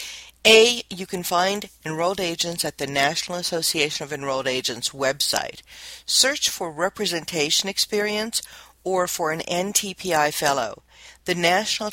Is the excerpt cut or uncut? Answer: uncut